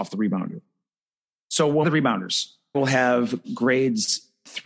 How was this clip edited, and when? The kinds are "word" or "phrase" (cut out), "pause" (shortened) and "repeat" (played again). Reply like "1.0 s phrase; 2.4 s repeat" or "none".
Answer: 1.8 s phrase; 2.7 s word